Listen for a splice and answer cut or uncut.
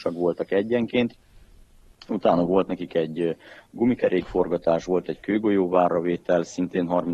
uncut